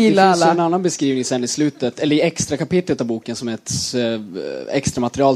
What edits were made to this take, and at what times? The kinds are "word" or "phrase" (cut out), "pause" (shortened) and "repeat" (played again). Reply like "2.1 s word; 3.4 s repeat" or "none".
none